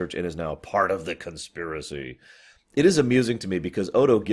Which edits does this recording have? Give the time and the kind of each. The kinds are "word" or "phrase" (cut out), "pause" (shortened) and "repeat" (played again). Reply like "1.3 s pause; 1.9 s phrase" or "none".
none